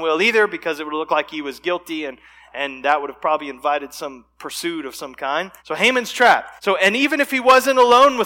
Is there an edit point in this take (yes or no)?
yes